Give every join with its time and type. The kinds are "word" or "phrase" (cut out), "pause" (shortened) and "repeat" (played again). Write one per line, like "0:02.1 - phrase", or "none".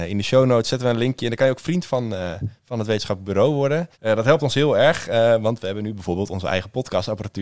0:02.6 - pause
0:03.9 - pause